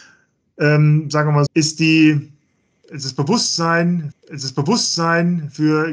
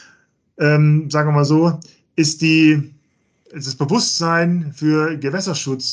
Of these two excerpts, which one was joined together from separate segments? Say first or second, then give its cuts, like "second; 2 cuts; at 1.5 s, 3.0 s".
first; 2 cuts; at 1.5 s, 4.1 s